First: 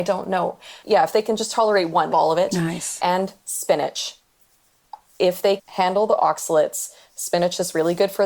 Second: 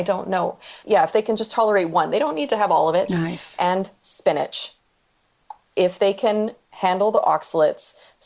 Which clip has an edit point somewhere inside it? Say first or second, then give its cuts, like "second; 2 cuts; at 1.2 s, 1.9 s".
first; 2 cuts; at 2.1 s, 5.6 s